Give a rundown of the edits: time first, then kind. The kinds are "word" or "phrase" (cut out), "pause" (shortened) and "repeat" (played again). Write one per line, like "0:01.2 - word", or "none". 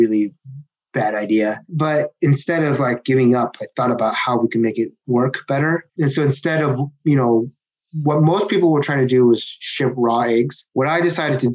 0:05.9 - pause